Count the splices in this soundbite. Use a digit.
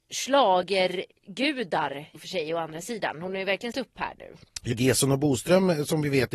3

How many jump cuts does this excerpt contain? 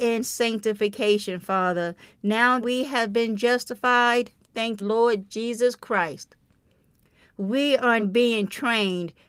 3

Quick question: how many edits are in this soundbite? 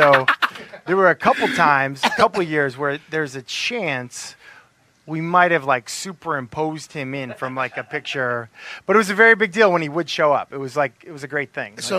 0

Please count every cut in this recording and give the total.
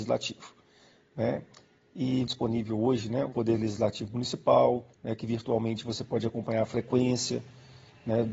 3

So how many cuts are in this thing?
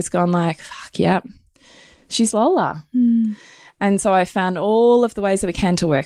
1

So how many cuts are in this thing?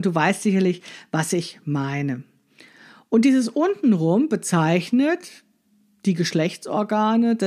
0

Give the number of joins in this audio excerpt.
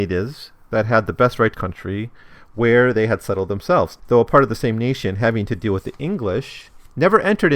2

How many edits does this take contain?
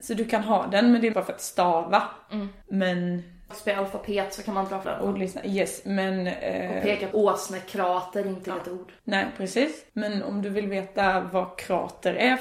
7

